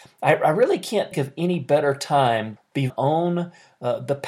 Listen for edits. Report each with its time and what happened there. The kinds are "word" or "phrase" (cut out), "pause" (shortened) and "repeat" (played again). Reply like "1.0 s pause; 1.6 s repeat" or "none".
1.1 s word; 2.6 s word; 2.9 s word